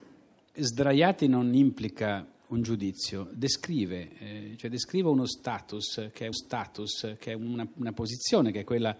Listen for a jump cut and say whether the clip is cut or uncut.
cut